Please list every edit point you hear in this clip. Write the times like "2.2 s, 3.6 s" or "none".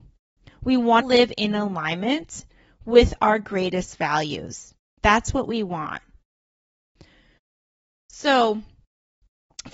1.0 s